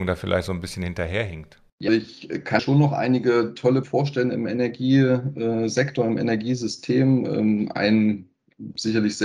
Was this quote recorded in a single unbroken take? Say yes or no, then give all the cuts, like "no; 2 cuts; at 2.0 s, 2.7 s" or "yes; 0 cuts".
no; 3 cuts; at 1.9 s, 2.6 s, 3.8 s